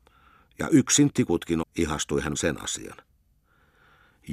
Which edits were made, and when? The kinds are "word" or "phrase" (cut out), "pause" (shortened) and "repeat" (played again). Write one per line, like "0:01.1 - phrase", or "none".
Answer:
0:01.1 - word
0:01.6 - phrase
0:02.3 - phrase